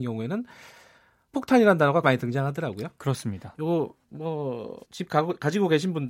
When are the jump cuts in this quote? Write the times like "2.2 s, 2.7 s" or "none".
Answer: 1.3 s, 2.0 s, 4.8 s